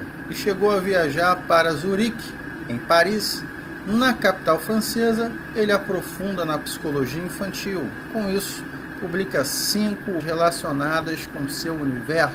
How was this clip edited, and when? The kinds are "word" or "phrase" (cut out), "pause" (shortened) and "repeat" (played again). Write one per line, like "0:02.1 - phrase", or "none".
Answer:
0:10.2 - word

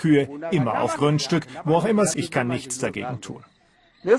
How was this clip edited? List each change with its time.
0:01.0 - word
0:02.1 - word

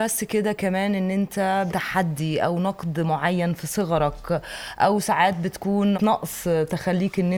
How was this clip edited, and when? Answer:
0:01.7 - phrase
0:05.9 - word

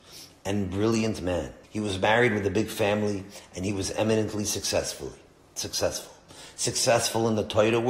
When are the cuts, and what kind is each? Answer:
0:01.6 - pause

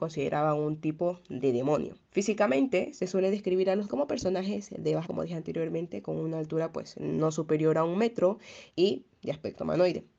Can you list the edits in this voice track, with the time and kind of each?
0:02.0 - pause
0:03.9 - word
0:05.0 - word
0:08.7 - pause

